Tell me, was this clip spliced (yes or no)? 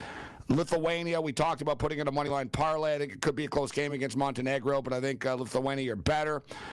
no